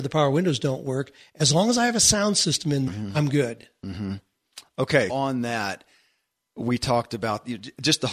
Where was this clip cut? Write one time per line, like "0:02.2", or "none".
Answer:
0:02.9
0:05.1